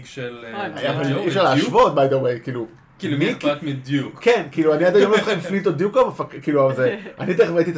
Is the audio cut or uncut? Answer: uncut